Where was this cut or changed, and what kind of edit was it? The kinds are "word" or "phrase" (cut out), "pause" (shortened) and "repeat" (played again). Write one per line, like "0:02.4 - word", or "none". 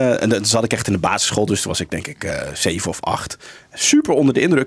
none